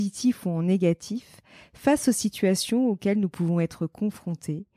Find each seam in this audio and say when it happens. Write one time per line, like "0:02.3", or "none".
none